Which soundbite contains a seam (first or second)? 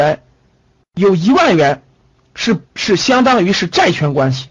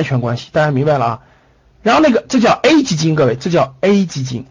first